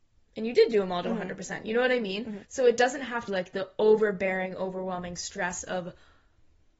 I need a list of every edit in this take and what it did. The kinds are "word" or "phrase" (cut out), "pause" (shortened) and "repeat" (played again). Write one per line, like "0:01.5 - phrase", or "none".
0:02.4 - pause
0:03.3 - word